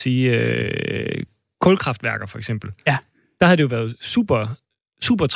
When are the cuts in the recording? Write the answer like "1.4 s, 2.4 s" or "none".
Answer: none